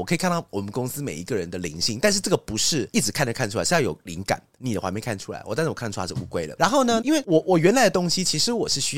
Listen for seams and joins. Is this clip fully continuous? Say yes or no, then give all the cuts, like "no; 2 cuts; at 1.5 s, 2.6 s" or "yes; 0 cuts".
no; 1 cut; at 7.0 s